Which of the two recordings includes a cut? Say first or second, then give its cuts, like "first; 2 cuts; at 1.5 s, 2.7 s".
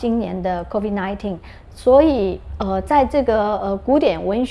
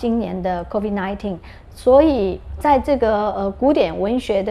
second; 1 cut; at 2.6 s